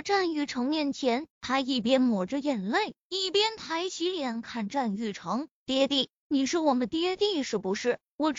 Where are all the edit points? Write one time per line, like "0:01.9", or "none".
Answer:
0:01.3